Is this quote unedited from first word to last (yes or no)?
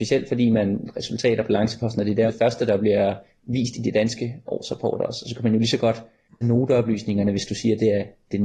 no